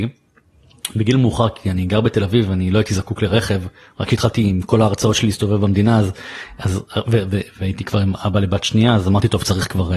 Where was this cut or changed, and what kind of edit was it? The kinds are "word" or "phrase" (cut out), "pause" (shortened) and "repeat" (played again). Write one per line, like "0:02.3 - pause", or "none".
none